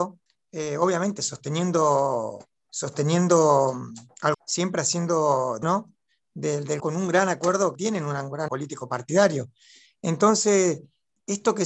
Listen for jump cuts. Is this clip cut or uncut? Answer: cut